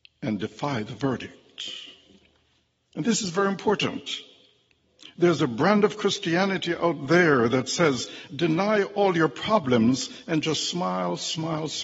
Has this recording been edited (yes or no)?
no